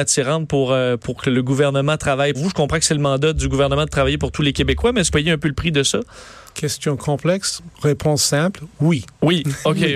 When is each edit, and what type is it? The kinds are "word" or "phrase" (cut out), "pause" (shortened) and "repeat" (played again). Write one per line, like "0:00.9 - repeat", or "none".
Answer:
0:01.0 - word
0:02.3 - word
0:05.1 - phrase
0:07.7 - pause